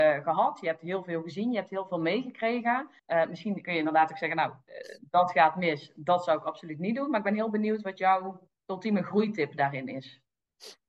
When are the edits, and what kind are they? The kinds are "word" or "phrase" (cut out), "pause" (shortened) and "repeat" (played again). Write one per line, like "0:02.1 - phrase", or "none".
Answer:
0:03.0 - pause
0:08.6 - pause